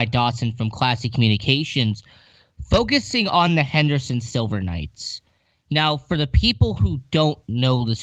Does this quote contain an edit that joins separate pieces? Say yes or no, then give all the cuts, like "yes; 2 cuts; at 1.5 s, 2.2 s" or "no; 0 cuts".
no; 0 cuts